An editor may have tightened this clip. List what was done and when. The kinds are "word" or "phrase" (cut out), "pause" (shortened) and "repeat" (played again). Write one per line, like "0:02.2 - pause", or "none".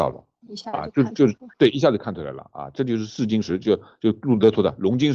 0:01.5 - pause